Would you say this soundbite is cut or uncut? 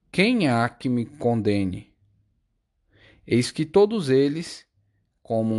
uncut